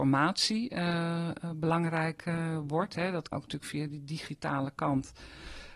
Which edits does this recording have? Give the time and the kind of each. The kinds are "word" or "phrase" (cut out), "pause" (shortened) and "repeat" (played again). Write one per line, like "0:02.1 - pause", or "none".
0:03.3 - word